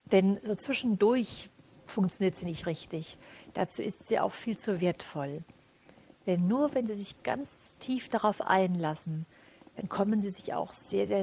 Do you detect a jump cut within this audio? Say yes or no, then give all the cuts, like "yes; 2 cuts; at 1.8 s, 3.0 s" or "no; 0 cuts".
no; 0 cuts